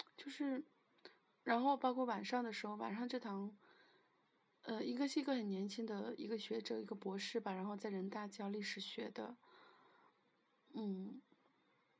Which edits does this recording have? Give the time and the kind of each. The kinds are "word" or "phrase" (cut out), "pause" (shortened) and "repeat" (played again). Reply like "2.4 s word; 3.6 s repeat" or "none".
none